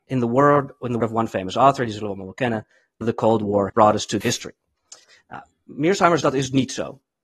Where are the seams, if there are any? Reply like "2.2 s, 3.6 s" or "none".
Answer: 1.0 s, 3.0 s, 3.7 s, 4.2 s, 6.2 s